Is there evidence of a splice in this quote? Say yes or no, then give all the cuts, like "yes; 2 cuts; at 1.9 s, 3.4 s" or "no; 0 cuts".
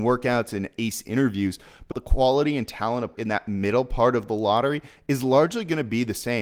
yes; 2 cuts; at 1.9 s, 3.1 s